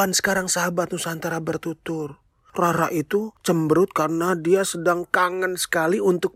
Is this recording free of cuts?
yes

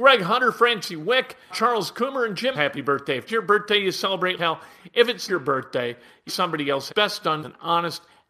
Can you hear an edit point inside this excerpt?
yes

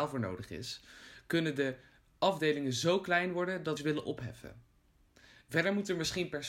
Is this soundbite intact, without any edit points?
no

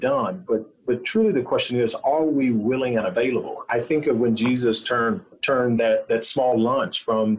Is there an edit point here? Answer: no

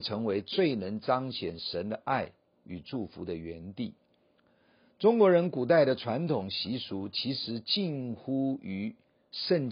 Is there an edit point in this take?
no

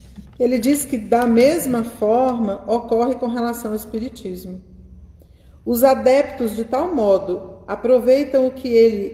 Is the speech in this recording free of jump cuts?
yes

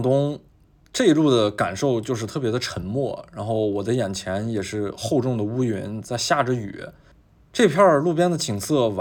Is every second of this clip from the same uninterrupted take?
yes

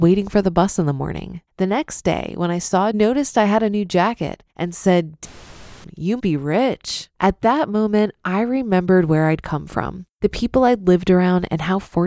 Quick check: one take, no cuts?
no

